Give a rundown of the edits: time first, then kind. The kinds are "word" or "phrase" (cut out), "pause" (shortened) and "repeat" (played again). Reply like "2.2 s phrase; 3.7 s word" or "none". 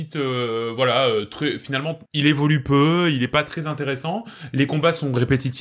2.1 s pause